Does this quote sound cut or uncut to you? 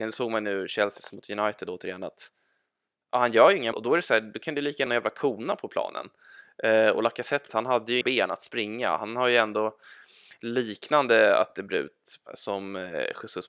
cut